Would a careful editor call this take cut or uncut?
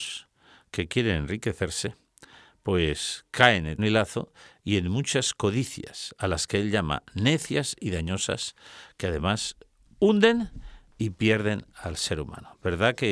cut